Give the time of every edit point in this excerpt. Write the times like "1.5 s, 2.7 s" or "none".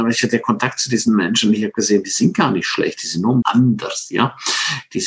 3.4 s

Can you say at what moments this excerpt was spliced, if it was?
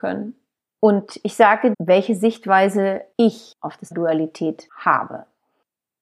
1.7 s, 3.9 s

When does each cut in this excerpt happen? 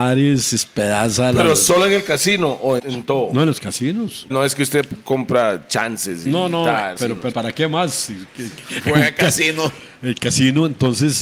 2.8 s, 4.3 s, 7.0 s, 7.3 s, 8.6 s

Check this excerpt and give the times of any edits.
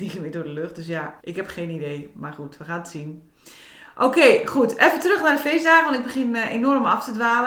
1.2 s

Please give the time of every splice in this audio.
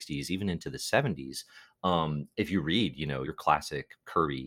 2.3 s, 3.2 s

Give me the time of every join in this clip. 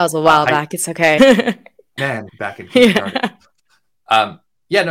1.2 s, 2.0 s, 2.3 s

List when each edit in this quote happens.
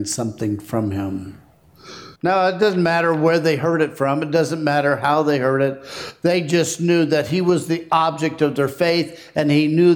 2.2 s

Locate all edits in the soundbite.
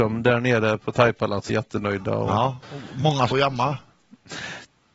1.5 s, 2.6 s, 3.3 s

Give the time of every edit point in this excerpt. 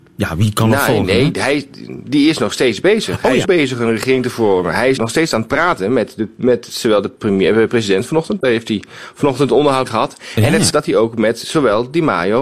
3.4 s, 5.0 s, 9.8 s, 10.7 s

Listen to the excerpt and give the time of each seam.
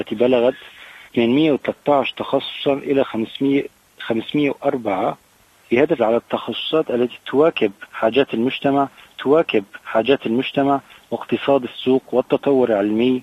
1.1 s, 6.0 s, 9.2 s

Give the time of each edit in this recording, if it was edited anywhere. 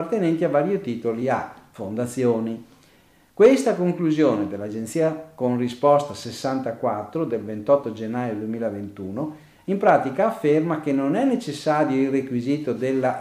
none

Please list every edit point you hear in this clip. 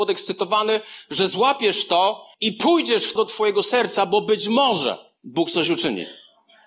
2.3 s, 3.2 s, 5.2 s

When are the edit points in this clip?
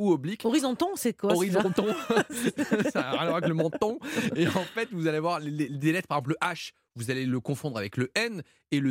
none

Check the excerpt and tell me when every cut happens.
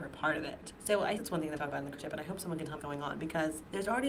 1.2 s, 1.6 s, 2.0 s, 2.8 s

